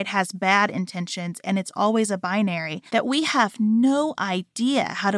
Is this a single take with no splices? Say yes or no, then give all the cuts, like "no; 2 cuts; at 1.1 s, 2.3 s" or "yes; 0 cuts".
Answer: no; 1 cut; at 2.9 s